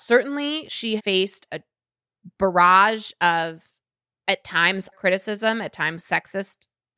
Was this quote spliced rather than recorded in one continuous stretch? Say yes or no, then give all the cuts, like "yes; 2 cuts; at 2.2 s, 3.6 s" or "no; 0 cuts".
yes; 3 cuts; at 1.0 s, 1.5 s, 4.9 s